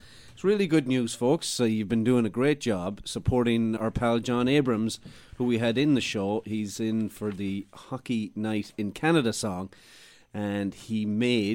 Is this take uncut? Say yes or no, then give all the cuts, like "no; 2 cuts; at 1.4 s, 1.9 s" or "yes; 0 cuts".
no; 1 cut; at 3.8 s